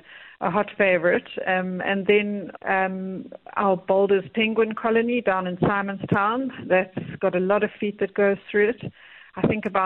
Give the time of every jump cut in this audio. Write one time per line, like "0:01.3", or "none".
0:02.6